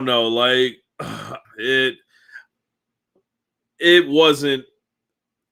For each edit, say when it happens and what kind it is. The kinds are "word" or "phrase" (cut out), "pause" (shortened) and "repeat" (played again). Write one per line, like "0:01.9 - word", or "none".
0:01.4 - pause